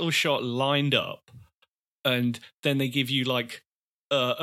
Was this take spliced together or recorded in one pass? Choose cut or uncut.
uncut